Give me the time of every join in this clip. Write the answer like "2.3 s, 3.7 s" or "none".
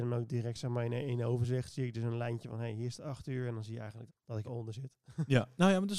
4.1 s, 4.4 s